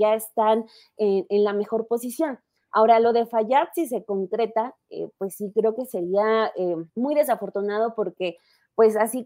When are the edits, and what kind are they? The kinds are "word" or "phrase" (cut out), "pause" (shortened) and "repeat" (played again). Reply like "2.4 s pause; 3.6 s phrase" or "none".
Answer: 6.9 s pause